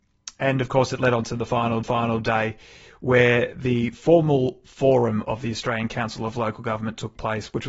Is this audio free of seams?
no; 1 cut; at 1.8 s

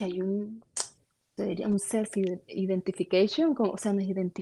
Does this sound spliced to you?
yes; 1 cut; at 1.4 s

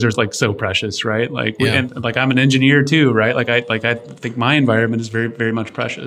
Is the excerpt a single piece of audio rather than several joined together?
yes; 0 cuts

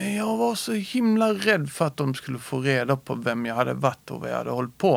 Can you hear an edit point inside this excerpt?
no; 0 cuts

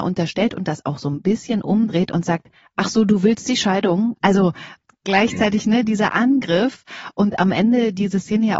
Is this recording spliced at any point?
no; 0 cuts

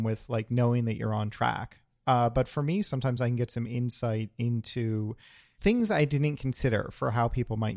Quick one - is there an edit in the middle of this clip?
no; 0 cuts

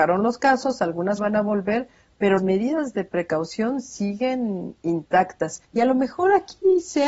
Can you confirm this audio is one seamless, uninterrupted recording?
no; 3 cuts; at 1.2 s, 2.4 s, 5.6 s

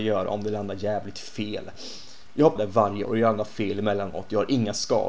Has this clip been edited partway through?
yes; 2 cuts; at 2.6 s, 3.0 s

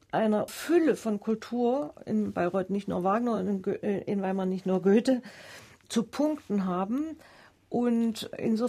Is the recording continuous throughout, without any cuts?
yes; 0 cuts

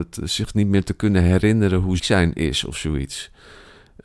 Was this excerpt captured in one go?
no; 1 cut; at 2.0 s

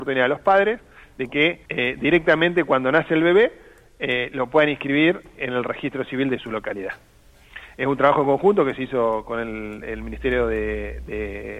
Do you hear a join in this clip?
yes; 1 cut; at 1.7 s

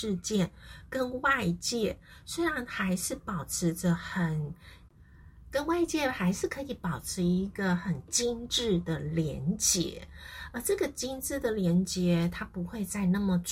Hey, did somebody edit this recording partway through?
no; 0 cuts

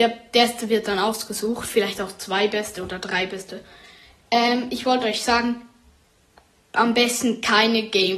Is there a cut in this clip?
no; 0 cuts

